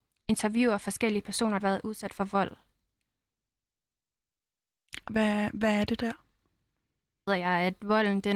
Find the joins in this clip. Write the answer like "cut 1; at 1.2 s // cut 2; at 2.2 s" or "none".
cut 1; at 1.6 s // cut 2; at 5.1 s // cut 3; at 6.0 s // cut 4; at 7.3 s